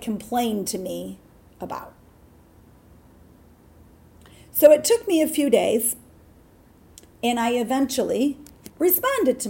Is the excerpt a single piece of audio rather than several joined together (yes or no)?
yes